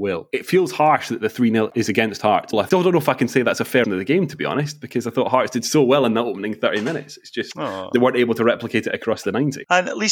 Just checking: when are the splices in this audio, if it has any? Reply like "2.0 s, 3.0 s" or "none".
2.5 s, 3.8 s